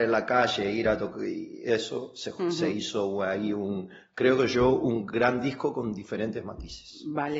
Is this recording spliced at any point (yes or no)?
no